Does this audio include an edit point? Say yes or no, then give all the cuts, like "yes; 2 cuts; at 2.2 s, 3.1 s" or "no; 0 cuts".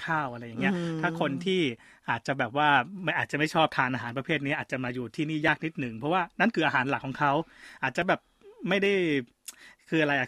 no; 0 cuts